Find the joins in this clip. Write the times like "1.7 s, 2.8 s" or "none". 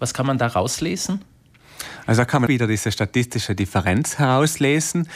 2.5 s